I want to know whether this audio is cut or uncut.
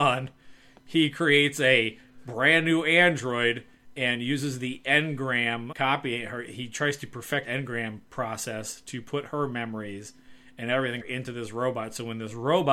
cut